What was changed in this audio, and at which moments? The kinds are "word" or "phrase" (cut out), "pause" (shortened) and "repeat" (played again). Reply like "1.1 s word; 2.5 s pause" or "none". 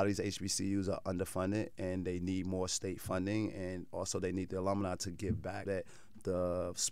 5.6 s word